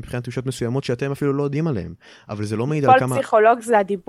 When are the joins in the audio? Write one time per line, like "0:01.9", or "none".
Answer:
none